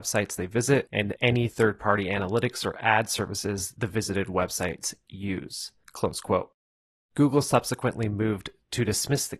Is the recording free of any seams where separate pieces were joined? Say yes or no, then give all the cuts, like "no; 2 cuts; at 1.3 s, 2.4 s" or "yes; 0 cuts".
yes; 0 cuts